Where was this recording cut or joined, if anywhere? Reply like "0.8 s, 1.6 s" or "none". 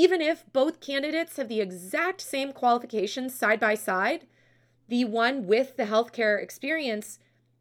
none